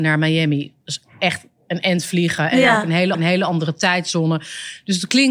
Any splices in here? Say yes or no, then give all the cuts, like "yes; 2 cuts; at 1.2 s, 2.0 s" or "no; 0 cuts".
yes; 1 cut; at 3.1 s